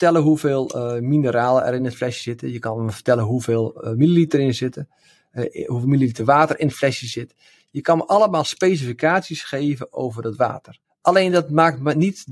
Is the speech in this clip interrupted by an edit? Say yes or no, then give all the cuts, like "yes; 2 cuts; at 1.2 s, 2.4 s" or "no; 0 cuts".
no; 0 cuts